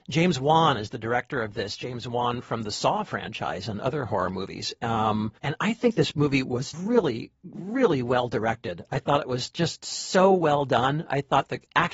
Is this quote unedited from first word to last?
no; 2 cuts; at 5.4 s, 6.7 s

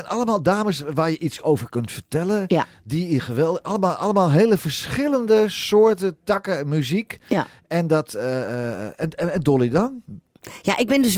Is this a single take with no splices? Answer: yes; 0 cuts

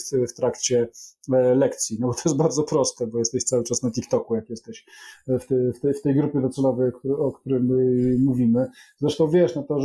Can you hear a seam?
no; 0 cuts

